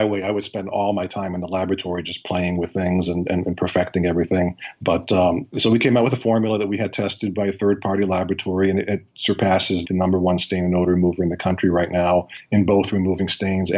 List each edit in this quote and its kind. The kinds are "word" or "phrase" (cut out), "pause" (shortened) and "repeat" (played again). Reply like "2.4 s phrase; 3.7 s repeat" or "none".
9.8 s phrase